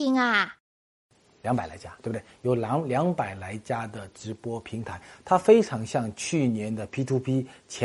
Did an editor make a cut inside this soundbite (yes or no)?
no